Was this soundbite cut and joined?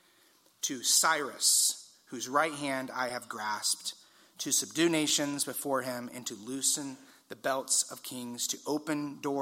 no; 0 cuts

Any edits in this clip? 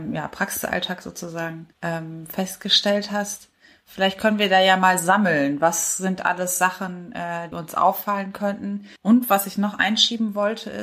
yes; 3 cuts; at 1.7 s, 7.5 s, 9.0 s

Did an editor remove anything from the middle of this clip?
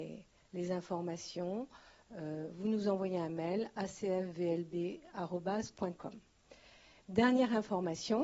no; 0 cuts

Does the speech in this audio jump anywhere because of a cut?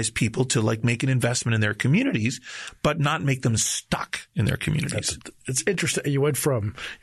no; 0 cuts

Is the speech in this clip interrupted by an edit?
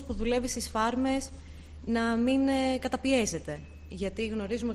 no; 0 cuts

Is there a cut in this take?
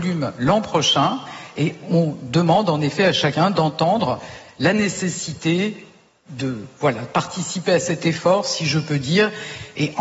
no; 0 cuts

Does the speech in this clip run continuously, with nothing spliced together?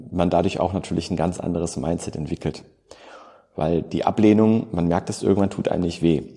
yes; 0 cuts

